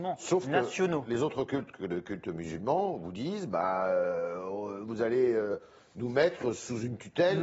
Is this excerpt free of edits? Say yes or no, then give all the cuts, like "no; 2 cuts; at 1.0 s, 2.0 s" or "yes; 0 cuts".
yes; 0 cuts